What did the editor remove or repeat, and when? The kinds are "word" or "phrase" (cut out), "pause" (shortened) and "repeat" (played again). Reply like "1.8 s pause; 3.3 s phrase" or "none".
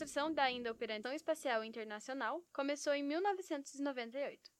1.0 s word; 2.5 s word